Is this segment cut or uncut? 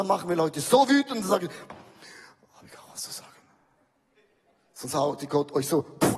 uncut